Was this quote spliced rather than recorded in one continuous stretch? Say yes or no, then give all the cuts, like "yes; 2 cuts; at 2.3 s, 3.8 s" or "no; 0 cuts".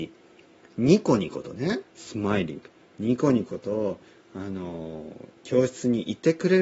yes; 1 cut; at 1.9 s